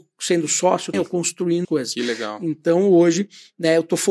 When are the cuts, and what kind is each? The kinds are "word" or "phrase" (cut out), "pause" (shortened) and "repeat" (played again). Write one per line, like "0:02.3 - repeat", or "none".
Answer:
0:00.9 - word
0:01.6 - word